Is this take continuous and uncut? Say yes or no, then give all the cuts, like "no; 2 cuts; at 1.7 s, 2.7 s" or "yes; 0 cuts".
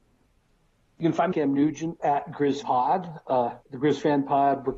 no; 4 cuts; at 1.3 s, 2.0 s, 2.6 s, 3.6 s